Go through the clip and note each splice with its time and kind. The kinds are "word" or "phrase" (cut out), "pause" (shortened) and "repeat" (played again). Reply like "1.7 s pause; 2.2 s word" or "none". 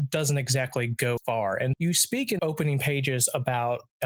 1.2 s word; 1.7 s word; 2.4 s word